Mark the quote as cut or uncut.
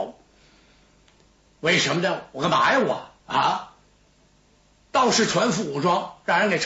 cut